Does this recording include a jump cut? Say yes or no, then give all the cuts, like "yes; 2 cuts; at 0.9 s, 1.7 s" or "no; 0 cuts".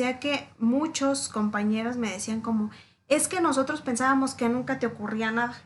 no; 0 cuts